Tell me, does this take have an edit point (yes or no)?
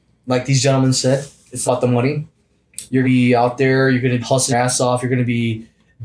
yes